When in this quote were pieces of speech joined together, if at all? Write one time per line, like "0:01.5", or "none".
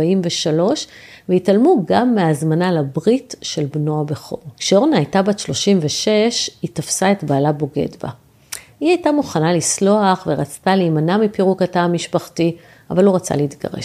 0:04.5